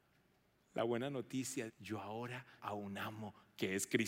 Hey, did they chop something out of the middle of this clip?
yes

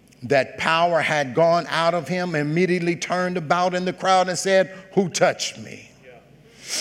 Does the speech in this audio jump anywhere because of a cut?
no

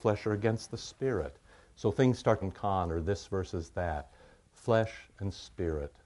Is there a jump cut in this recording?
yes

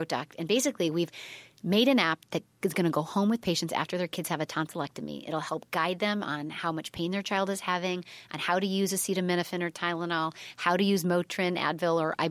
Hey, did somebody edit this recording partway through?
no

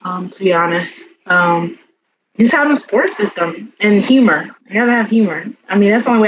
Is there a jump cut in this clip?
yes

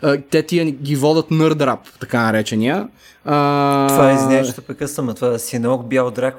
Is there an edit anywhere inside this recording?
no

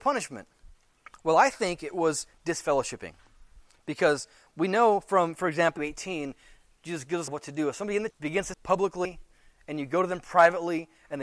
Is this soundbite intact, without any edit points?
no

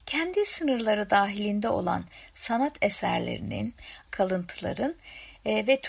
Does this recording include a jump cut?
yes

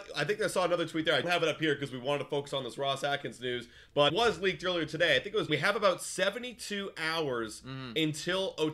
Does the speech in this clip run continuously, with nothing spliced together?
no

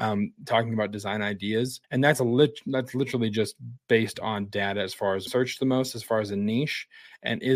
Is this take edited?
yes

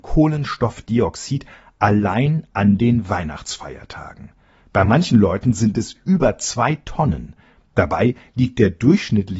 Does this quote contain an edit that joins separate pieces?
no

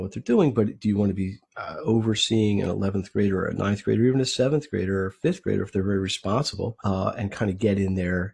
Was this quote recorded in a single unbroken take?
no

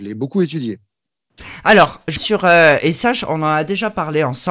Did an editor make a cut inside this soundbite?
yes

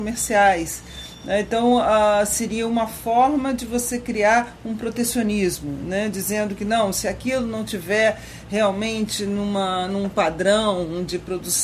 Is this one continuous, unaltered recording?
yes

